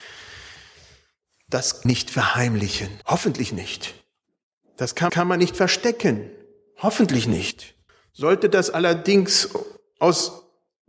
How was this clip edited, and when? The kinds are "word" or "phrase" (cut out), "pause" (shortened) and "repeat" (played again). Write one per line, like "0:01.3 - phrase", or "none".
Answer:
0:01.9 - phrase
0:03.0 - pause
0:05.1 - repeat
0:07.9 - pause